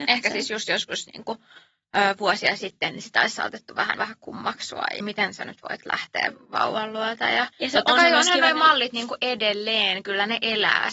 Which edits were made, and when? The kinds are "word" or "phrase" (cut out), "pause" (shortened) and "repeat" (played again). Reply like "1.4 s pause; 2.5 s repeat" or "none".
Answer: 4.0 s phrase; 5.0 s phrase; 7.5 s pause